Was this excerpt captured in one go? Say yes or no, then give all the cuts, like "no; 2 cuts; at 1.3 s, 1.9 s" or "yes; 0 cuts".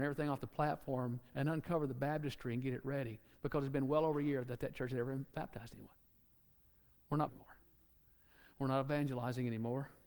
no; 1 cut; at 7.3 s